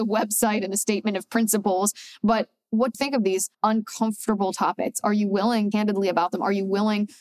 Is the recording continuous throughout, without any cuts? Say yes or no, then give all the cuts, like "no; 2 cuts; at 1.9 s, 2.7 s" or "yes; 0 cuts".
no; 3 cuts; at 2.9 s, 3.5 s, 5.7 s